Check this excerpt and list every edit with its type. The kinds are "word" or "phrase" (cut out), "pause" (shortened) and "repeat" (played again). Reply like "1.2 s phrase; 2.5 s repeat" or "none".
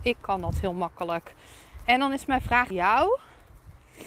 2.7 s word